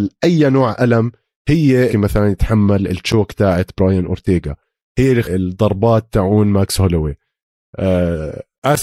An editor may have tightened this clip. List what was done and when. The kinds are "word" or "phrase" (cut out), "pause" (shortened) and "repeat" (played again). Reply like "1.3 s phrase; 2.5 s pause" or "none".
1.9 s phrase; 5.2 s phrase